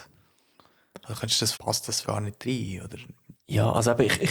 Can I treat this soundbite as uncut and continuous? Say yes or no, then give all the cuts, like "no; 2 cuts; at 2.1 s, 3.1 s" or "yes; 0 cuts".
no; 3 cuts; at 1.5 s, 2.0 s, 3.3 s